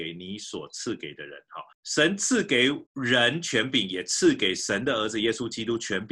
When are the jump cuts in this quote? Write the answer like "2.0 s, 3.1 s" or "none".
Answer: 1.7 s, 2.9 s